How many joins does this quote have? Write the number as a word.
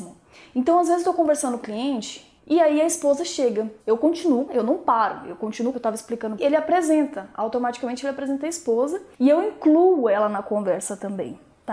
seven